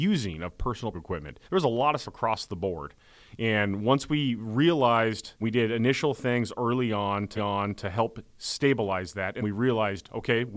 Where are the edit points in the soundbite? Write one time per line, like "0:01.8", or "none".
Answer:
0:00.9
0:01.4
0:02.0
0:05.4
0:07.4
0:09.4

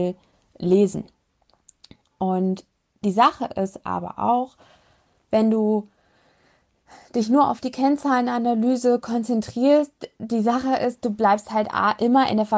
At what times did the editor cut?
none

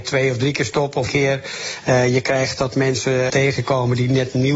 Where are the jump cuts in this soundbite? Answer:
0:01.1
0:03.3

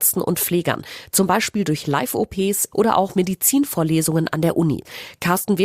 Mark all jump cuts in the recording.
0:02.7

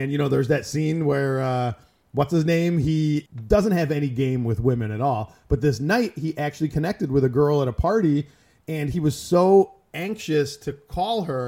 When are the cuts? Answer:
none

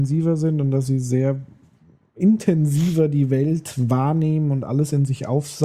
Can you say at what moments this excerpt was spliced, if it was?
none

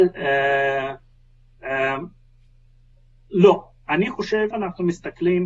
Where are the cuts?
0:04.5

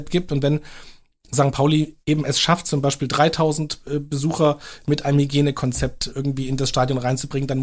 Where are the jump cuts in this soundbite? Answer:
0:02.0
0:06.1

